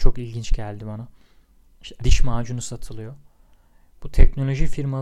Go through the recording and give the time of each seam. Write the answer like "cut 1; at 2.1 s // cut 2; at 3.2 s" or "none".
cut 1; at 2.0 s